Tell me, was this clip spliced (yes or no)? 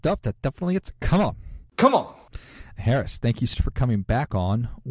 yes